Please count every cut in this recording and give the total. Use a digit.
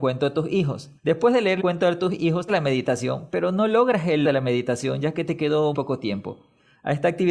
5